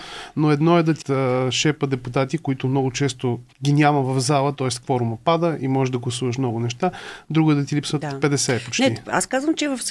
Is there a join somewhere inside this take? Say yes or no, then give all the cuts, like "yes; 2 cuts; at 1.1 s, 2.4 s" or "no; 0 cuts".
yes; 2 cuts; at 1.0 s, 3.5 s